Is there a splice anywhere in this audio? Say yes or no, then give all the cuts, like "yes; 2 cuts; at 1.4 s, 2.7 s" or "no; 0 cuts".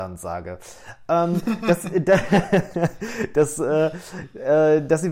no; 0 cuts